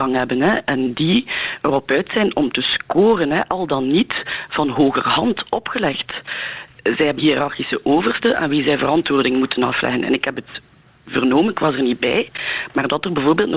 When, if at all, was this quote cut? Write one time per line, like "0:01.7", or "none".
0:07.2